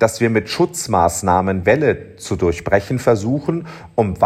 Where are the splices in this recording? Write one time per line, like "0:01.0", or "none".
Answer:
0:01.6